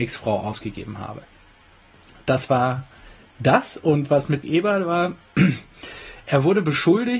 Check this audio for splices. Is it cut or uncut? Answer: cut